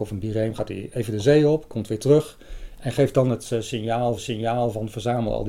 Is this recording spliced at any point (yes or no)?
yes